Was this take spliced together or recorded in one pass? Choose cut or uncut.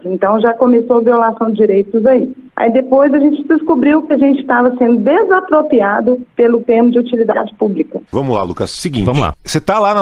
cut